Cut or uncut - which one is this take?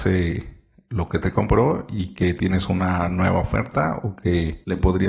uncut